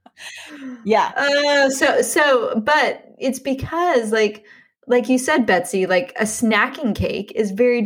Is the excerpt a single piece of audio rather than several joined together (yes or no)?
yes